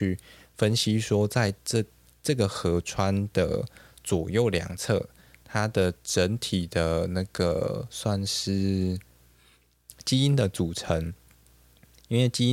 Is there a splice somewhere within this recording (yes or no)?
no